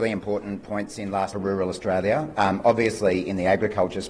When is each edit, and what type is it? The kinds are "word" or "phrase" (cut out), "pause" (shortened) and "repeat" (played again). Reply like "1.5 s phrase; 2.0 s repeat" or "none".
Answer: 1.3 s phrase